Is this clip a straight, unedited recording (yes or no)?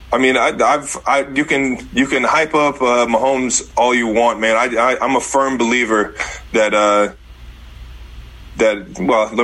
yes